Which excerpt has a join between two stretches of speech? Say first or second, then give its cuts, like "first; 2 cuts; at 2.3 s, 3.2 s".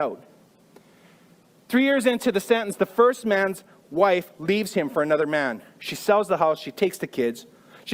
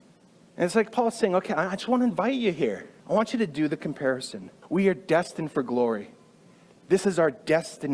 second; 2 cuts; at 3.0 s, 4.6 s